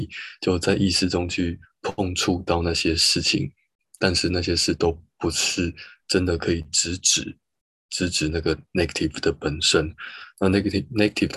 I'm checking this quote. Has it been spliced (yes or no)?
no